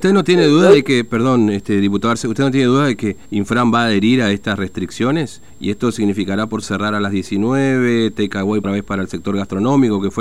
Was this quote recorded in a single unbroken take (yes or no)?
no